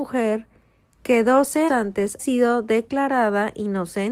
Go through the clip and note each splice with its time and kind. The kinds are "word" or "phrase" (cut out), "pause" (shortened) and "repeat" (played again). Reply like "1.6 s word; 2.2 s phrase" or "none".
1.7 s word; 2.2 s word